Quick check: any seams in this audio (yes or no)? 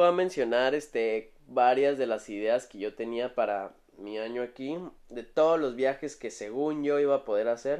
yes